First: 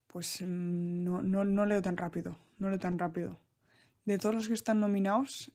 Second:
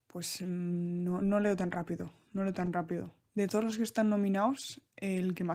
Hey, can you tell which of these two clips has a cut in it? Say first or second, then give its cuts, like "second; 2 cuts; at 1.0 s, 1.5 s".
second; 2 cuts; at 1.2 s, 3.2 s